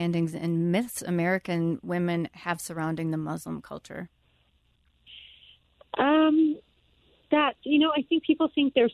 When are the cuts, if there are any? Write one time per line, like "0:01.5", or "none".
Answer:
none